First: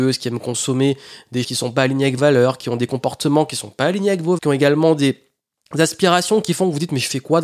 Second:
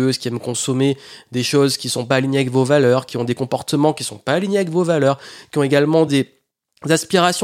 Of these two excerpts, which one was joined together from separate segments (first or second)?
first